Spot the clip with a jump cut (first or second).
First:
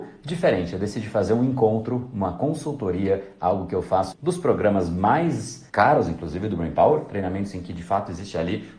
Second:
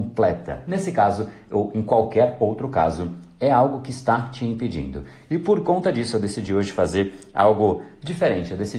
first